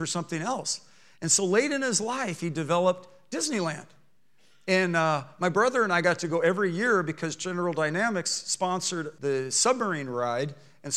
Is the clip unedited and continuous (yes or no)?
yes